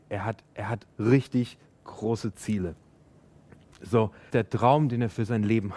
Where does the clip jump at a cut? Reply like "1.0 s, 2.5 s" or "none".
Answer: 0.9 s, 4.3 s